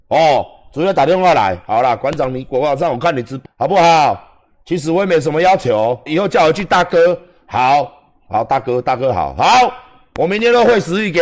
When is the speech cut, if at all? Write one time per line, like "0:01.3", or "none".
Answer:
0:03.5
0:06.1